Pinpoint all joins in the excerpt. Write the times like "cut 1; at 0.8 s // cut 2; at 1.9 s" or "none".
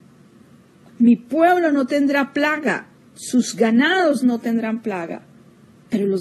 cut 1; at 2.9 s